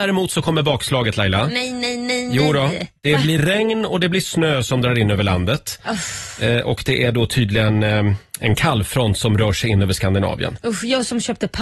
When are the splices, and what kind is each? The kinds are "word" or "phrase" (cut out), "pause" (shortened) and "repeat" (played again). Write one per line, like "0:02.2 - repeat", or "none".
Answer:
0:03.0 - pause